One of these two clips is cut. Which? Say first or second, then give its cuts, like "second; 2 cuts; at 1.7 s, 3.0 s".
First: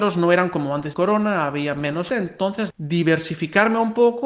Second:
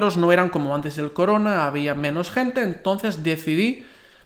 first; 3 cuts; at 0.9 s, 2.1 s, 2.7 s